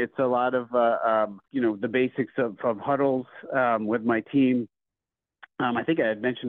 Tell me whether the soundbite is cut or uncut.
cut